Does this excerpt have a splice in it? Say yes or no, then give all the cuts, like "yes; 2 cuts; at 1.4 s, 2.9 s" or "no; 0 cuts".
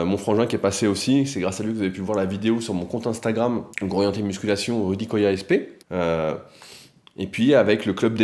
yes; 2 cuts; at 3.7 s, 5.8 s